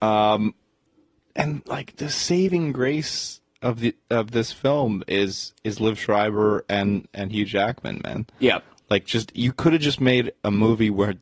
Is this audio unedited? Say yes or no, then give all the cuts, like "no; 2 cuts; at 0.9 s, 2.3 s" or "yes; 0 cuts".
yes; 0 cuts